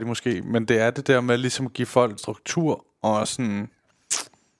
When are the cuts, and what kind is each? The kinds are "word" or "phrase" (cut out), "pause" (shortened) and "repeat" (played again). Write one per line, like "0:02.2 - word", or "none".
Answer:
0:02.2 - word